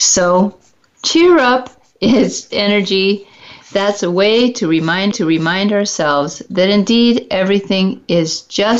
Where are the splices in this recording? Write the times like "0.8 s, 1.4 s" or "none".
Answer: 2.5 s, 5.1 s